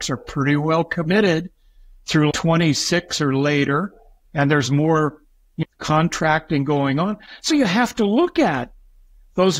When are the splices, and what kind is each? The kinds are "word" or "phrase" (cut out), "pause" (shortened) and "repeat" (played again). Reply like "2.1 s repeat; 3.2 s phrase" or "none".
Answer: 2.3 s word; 5.6 s word; 7.5 s word

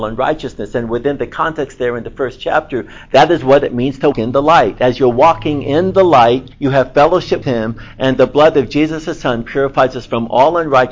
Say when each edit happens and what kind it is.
4.1 s word; 6.5 s pause; 7.4 s word

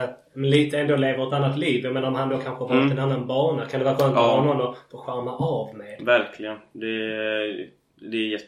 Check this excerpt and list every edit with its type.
none

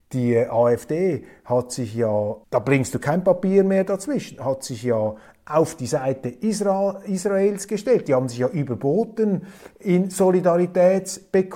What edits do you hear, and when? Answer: 2.4 s word

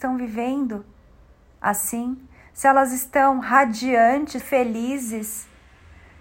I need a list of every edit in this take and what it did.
4.4 s word

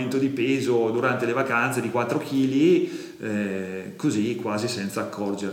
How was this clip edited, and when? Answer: none

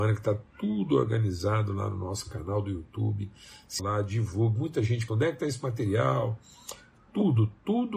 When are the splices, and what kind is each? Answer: 3.8 s word; 5.1 s word

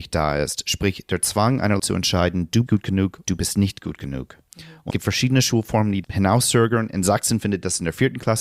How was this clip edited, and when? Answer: 1.8 s word; 2.7 s word; 3.2 s word; 4.9 s word; 6.0 s word

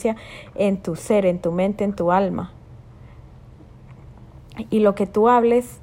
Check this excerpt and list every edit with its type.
none

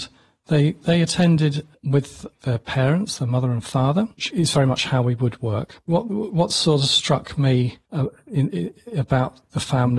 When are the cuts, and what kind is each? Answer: 4.3 s word; 7.9 s pause

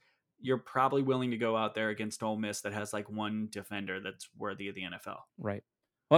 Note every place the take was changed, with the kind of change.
5.3 s pause

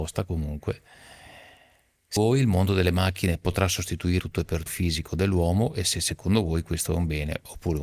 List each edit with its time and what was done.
2.2 s word; 4.2 s word; 4.7 s phrase

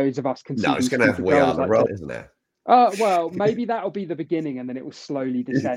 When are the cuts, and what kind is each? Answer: 1.9 s word

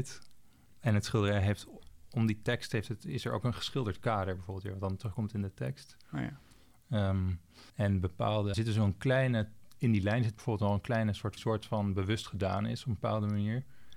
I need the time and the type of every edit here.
7.7 s pause; 8.5 s word; 11.4 s phrase

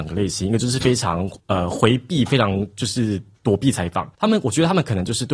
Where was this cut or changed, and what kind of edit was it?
1.4 s pause; 4.1 s pause

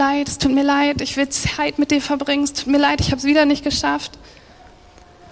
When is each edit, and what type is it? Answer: none

